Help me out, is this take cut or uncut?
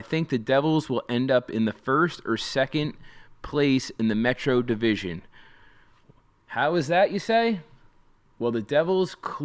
uncut